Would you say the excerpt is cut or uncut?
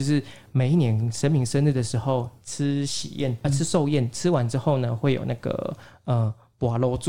cut